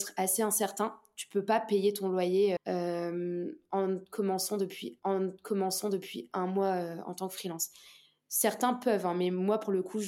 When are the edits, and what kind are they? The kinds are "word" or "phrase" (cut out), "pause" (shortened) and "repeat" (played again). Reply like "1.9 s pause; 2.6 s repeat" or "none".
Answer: 2.6 s word; 5.0 s repeat